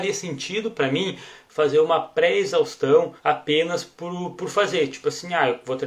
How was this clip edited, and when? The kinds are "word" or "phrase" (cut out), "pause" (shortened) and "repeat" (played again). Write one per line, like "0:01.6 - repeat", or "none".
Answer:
0:03.2 - pause